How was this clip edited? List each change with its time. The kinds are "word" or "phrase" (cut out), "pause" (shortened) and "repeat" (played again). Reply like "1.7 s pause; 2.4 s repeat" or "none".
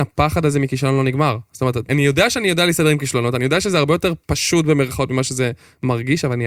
1.9 s word

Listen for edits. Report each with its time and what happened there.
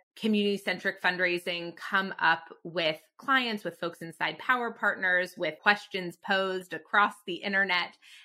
none

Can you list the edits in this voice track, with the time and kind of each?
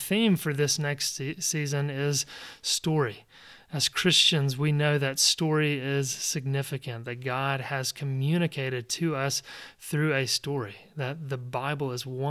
none

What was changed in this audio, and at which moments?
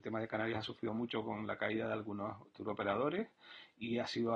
none

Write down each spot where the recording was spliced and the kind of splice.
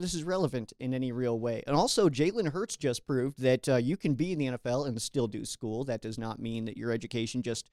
none

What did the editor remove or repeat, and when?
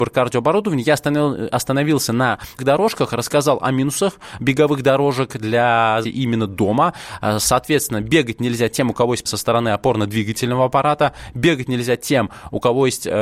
2.6 s word; 6.0 s word; 9.3 s word

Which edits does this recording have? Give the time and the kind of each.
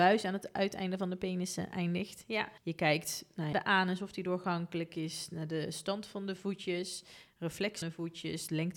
2.6 s pause; 3.5 s phrase; 7.8 s word

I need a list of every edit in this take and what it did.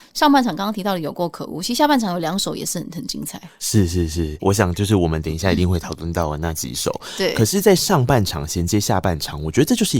4.4 s word

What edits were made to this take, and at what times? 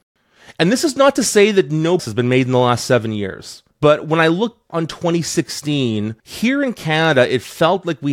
2.0 s word; 3.7 s pause; 4.7 s word; 6.2 s pause

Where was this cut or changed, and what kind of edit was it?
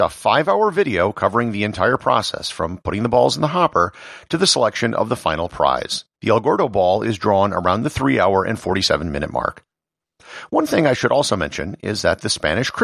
6.1 s pause

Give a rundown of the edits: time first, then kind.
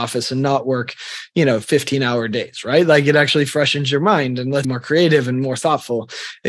4.6 s phrase

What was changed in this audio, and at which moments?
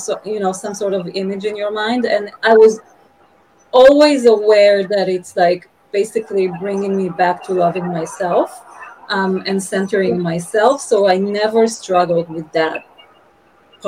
none

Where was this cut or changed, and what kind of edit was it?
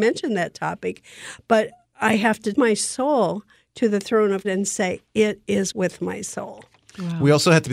2.5 s word; 4.4 s word; 5.7 s word

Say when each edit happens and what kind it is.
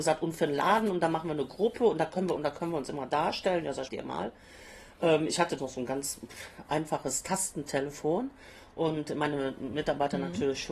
2.4 s phrase; 3.9 s phrase; 5.6 s word

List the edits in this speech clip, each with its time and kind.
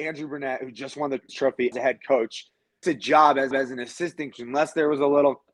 1.3 s word; 1.7 s word; 2.8 s word; 3.5 s repeat; 4.3 s word

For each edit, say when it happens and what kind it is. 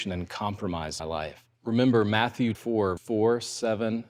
1.0 s phrase; 1.5 s pause; 2.5 s word; 3.0 s word

